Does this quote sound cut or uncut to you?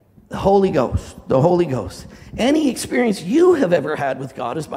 uncut